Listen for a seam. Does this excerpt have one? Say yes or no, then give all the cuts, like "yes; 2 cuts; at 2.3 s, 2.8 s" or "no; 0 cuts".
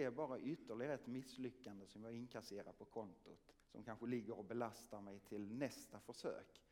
yes; 1 cut; at 3.6 s